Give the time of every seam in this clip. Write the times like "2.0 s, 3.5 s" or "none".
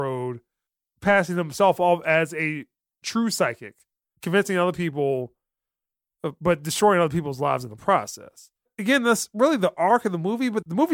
none